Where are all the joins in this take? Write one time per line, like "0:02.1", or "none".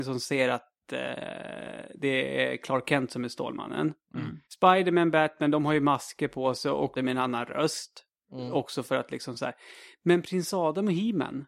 0:04.4
0:07.0